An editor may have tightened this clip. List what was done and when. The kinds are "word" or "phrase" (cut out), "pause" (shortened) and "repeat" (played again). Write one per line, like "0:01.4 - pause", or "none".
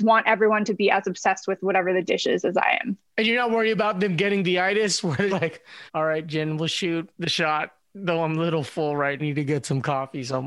0:03.1 - pause
0:05.3 - word
0:05.9 - pause
0:07.1 - pause
0:09.2 - phrase